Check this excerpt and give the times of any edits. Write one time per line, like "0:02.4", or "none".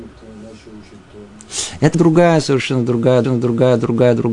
0:01.9
0:03.2